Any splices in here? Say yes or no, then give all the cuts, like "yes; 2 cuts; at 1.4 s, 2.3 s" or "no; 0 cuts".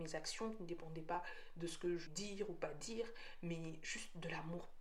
yes; 1 cut; at 2.1 s